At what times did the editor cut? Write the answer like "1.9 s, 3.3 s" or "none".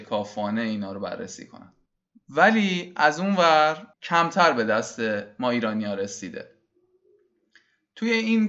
1.9 s, 3.9 s